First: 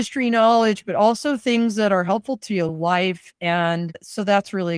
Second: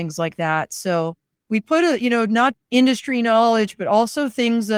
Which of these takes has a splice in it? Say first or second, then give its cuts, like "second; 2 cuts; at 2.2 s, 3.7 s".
second; 1 cut; at 2.5 s